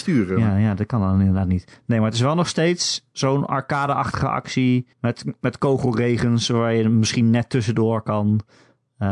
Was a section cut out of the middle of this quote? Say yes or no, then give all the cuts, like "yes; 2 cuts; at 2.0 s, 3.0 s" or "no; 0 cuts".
yes; 2 cuts; at 3.1 s, 4.9 s